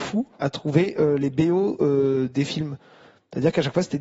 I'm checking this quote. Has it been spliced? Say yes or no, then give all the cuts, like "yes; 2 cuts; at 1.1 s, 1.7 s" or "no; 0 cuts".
no; 0 cuts